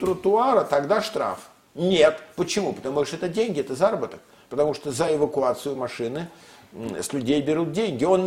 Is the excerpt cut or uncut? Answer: uncut